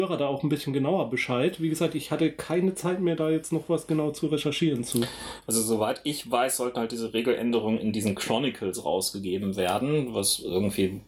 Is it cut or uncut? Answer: uncut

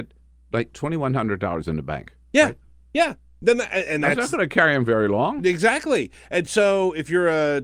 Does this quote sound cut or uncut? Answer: uncut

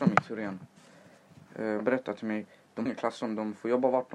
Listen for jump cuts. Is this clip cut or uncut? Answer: cut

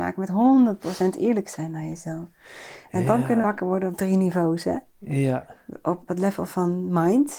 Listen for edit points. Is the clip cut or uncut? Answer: cut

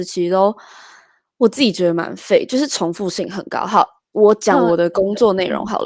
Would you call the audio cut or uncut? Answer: uncut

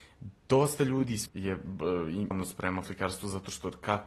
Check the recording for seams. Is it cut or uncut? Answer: cut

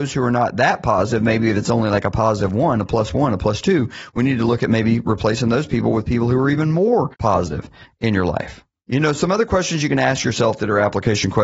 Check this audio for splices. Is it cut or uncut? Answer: cut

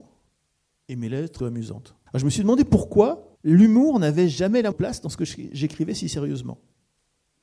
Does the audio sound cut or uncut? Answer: cut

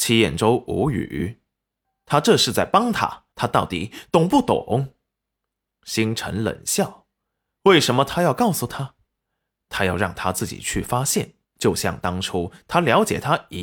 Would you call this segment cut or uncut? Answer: cut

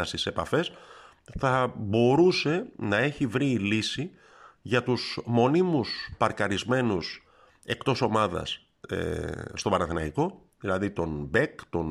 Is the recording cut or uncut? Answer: uncut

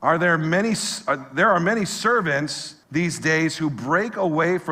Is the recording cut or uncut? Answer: cut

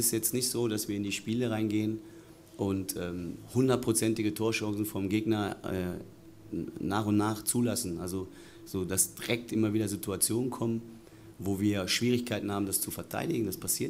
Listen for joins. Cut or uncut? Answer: uncut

